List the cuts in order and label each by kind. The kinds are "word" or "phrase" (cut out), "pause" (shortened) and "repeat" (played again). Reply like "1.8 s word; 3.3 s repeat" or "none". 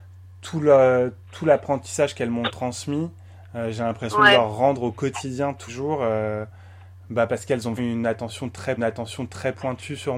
5.7 s word; 7.8 s word; 8.8 s repeat